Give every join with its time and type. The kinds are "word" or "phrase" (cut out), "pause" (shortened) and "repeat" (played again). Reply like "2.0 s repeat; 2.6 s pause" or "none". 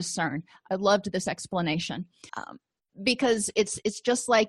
2.3 s pause